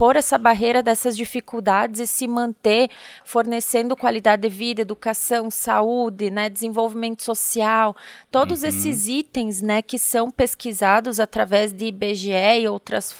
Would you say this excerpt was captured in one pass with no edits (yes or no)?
yes